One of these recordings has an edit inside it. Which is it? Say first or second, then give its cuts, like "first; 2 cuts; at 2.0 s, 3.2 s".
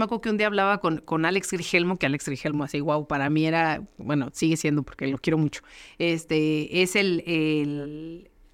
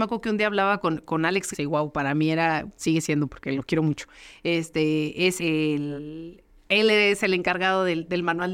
second; 3 cuts; at 1.5 s, 2.8 s, 5.4 s